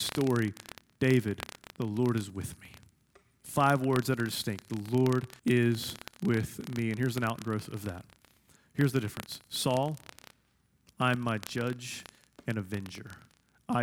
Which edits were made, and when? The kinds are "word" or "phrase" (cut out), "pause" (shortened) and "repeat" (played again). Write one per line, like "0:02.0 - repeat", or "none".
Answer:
0:05.4 - pause

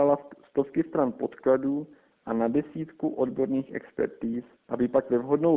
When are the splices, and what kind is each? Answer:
none

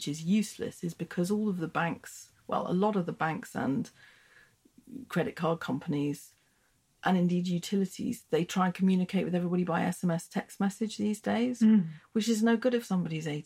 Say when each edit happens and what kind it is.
none

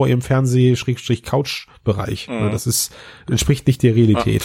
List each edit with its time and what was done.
none

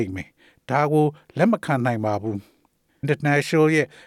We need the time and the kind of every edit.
0:03.0 - word

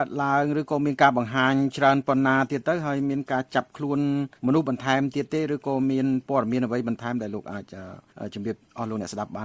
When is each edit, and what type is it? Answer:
0:04.4 - pause

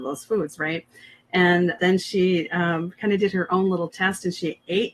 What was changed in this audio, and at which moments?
0:01.8 - word

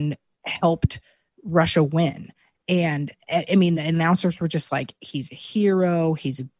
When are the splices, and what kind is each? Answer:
none

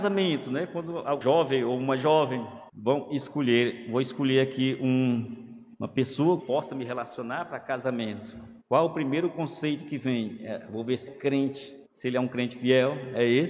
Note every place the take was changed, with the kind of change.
0:01.2 - word
0:02.7 - pause
0:05.7 - pause
0:06.4 - phrase
0:08.6 - pause
0:11.1 - phrase
0:11.8 - pause

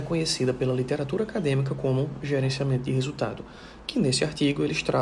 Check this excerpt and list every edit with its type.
none

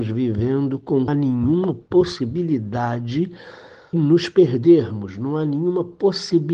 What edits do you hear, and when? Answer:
0:01.1 - phrase
0:03.9 - word

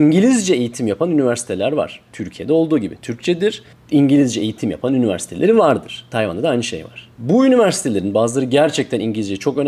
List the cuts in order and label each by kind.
0:03.0 - phrase
0:03.7 - pause
0:07.1 - pause

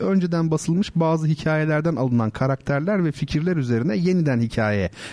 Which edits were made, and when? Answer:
none

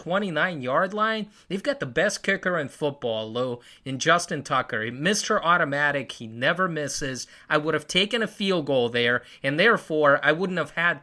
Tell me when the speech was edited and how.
none

